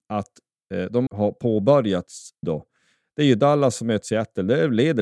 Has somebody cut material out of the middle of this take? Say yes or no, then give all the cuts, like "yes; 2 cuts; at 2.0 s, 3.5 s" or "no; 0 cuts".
yes; 2 cuts; at 1.1 s, 2.4 s